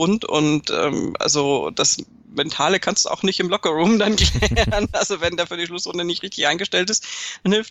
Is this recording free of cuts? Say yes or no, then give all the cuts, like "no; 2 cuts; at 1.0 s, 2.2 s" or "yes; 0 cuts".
yes; 0 cuts